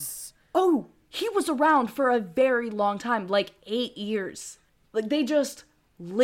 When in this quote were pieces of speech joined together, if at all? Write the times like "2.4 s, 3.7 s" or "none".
4.7 s